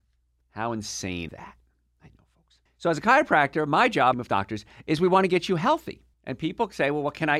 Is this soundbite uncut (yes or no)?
no